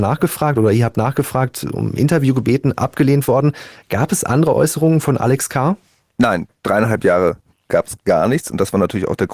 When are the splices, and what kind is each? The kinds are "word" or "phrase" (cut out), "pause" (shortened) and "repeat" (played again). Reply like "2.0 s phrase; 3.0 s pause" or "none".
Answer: none